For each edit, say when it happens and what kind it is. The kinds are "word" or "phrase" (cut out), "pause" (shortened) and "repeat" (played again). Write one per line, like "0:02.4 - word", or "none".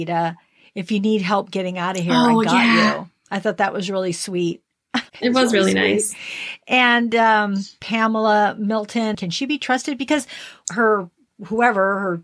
0:05.1 - pause
0:10.6 - phrase